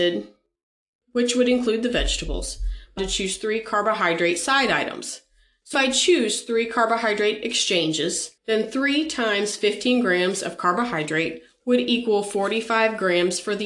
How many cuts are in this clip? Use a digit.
3